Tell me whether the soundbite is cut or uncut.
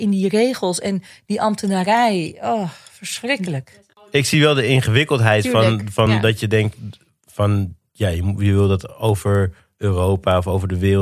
uncut